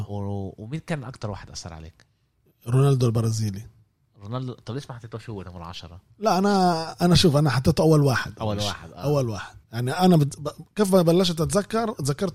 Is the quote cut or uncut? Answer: cut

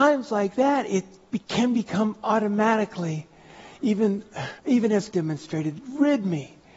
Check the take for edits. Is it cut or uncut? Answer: cut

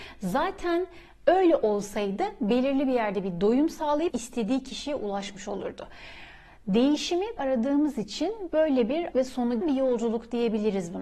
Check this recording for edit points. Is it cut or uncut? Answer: cut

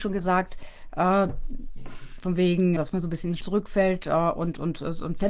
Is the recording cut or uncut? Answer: cut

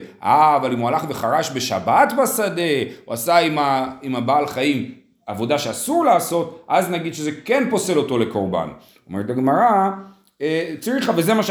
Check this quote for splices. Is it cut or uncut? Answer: uncut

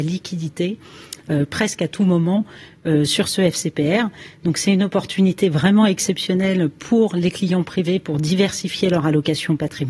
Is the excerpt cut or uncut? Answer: uncut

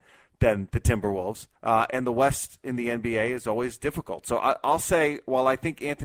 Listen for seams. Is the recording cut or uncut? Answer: cut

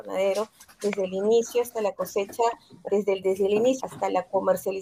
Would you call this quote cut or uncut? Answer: cut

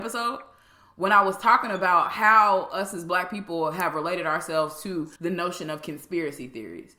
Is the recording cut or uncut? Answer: cut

